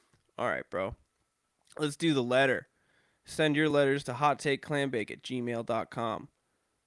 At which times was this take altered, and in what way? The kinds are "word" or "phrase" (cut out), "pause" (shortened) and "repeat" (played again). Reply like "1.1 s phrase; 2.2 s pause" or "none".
none